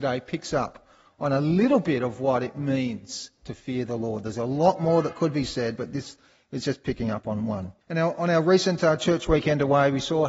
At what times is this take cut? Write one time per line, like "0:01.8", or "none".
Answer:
0:07.8